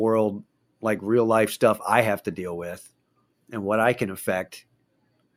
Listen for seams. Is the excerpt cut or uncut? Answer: cut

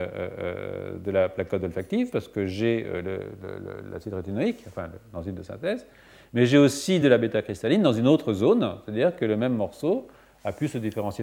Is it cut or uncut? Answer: uncut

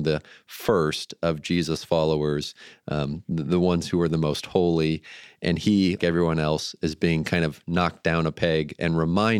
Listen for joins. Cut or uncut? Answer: cut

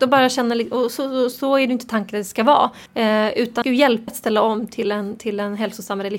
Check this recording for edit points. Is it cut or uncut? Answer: cut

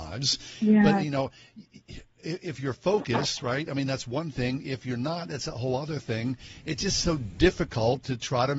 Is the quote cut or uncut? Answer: uncut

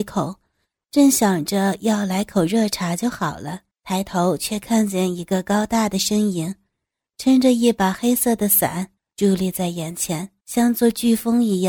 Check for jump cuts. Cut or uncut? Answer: cut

